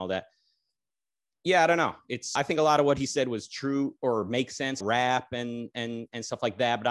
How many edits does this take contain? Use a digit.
2